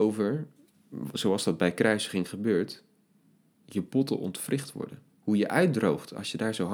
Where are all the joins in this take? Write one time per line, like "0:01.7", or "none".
0:05.1

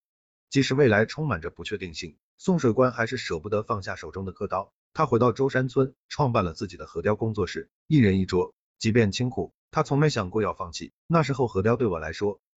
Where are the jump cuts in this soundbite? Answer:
0:08.7

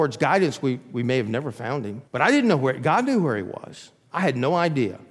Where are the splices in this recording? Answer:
0:02.1

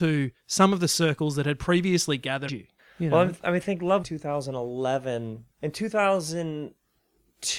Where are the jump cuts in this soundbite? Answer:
0:02.5
0:04.0
0:05.5

